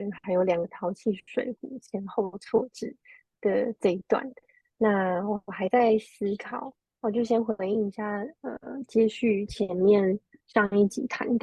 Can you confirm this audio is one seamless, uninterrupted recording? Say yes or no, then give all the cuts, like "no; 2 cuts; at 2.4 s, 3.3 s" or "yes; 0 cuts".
yes; 0 cuts